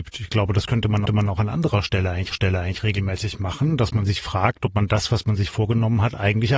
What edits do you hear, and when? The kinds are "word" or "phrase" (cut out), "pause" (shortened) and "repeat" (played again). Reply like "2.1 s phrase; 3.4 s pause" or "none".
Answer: 1.1 s repeat; 2.3 s repeat